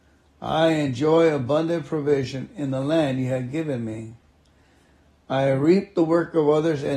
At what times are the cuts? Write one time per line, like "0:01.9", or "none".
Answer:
none

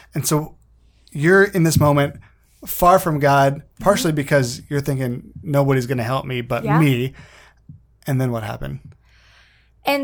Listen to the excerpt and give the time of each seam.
none

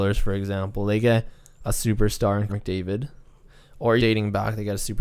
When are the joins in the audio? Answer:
0:02.5
0:04.0

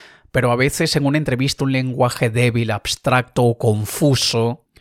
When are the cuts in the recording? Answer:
0:01.6

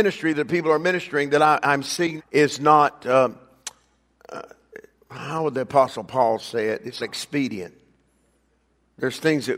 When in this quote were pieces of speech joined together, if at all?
0:02.2
0:04.9
0:07.0

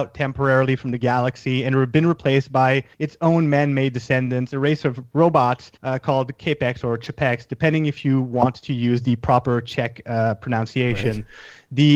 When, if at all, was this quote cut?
0:02.9
0:05.8

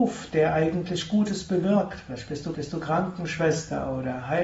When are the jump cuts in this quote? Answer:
0:02.5

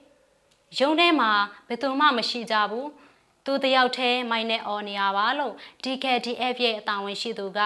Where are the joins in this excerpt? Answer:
none

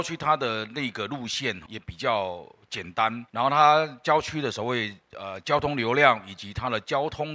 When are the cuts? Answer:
0:01.7
0:03.3

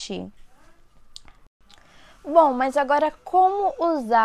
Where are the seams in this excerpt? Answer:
none

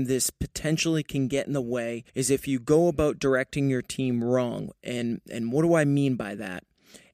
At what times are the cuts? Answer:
0:02.1

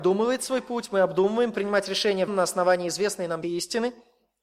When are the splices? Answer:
0:01.5
0:02.3
0:03.4

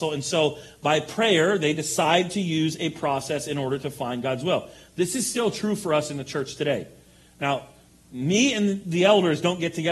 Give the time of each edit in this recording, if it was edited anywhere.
none

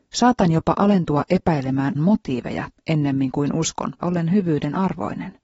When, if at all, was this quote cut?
0:02.0
0:04.0

